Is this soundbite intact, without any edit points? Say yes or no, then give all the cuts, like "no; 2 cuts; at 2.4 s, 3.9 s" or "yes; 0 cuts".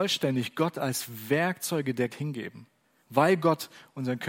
no; 2 cuts; at 2.1 s, 2.8 s